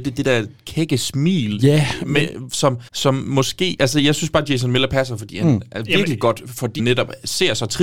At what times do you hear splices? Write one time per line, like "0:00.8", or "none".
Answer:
0:02.9
0:06.8